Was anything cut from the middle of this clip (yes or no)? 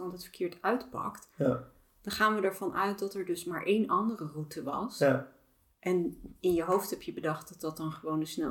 no